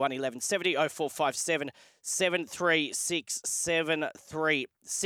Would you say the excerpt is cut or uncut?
uncut